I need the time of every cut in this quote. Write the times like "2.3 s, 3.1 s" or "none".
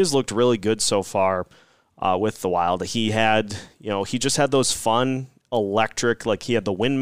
none